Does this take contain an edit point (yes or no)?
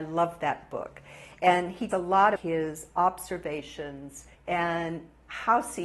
yes